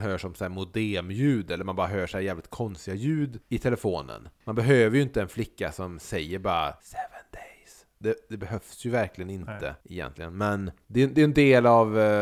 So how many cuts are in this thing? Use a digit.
1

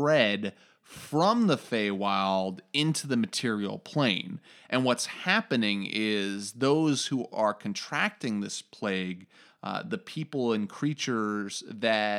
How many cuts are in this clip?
0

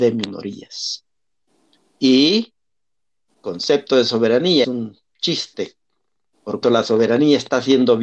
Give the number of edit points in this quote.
3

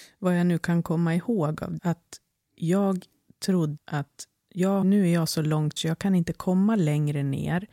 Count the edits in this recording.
4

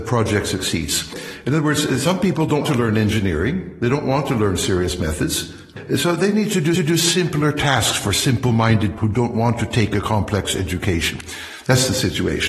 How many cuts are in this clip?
3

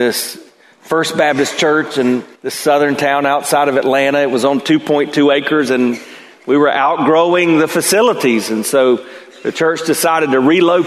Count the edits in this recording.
1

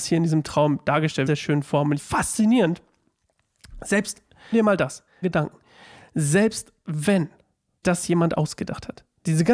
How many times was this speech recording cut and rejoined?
5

